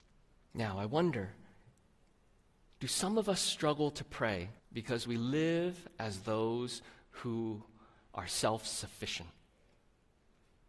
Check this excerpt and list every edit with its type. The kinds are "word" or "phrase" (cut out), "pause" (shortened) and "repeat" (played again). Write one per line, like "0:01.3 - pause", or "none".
0:04.6 - pause